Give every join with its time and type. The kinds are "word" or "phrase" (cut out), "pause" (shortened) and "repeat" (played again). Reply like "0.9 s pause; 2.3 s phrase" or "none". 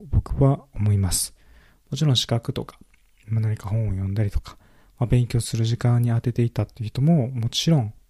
none